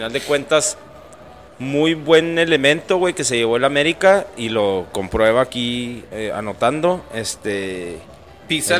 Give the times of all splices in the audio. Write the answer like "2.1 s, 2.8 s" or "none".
none